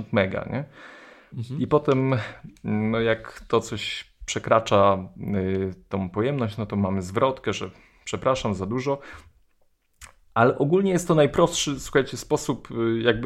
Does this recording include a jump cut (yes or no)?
no